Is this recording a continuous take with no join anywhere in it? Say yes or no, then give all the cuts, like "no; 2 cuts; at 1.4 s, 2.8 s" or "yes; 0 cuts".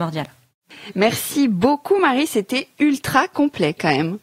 yes; 0 cuts